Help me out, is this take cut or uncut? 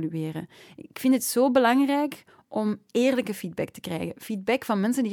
uncut